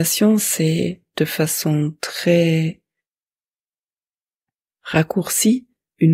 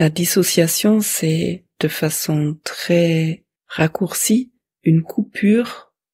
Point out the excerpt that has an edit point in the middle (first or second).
second